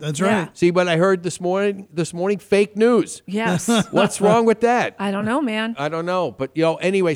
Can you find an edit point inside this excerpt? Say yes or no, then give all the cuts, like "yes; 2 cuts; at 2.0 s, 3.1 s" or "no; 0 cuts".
no; 0 cuts